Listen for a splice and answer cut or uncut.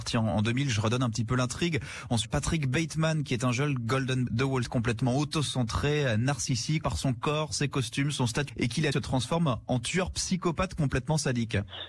cut